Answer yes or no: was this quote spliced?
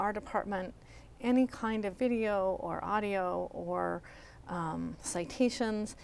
yes